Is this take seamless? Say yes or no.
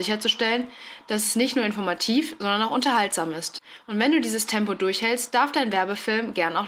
yes